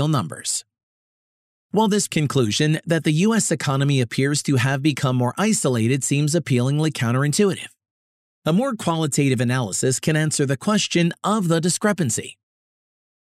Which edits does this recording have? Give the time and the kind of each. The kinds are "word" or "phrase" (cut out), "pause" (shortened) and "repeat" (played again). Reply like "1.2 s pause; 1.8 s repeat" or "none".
2.1 s word